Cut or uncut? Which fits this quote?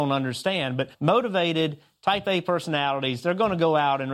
cut